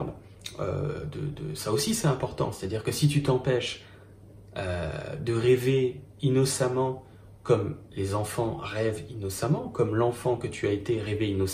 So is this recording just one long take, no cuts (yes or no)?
yes